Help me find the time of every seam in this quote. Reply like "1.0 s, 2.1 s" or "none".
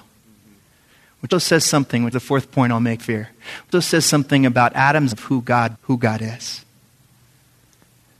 1.3 s, 2.1 s, 3.0 s, 3.7 s, 5.1 s, 5.7 s